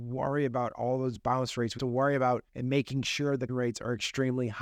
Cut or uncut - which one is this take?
cut